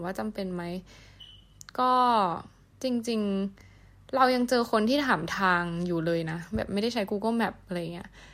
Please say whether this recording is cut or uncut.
cut